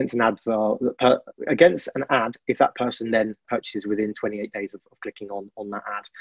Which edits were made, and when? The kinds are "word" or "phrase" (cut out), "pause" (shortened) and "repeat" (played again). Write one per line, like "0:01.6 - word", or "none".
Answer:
0:03.4 - word